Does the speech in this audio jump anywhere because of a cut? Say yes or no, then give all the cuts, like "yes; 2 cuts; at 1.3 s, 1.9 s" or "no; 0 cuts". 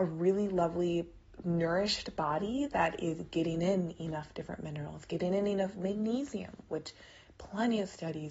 no; 0 cuts